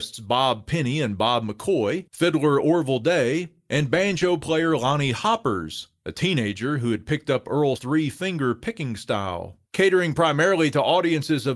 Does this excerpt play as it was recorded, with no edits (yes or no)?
no